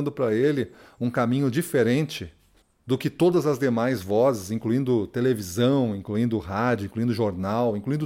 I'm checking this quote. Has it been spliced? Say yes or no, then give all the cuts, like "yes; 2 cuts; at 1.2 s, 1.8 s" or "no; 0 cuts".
yes; 1 cut; at 2.6 s